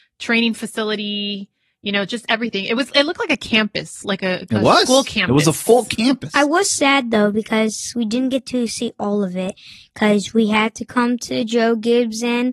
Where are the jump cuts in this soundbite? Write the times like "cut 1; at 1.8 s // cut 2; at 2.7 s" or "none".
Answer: none